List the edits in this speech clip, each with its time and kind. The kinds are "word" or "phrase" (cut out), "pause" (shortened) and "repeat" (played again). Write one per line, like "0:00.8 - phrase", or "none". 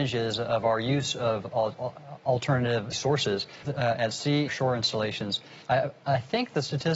0:02.9 - word
0:03.6 - word
0:04.5 - phrase
0:05.6 - pause